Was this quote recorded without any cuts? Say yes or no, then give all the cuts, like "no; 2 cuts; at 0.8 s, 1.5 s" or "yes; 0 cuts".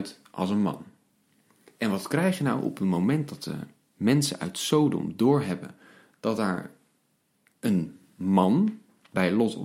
yes; 0 cuts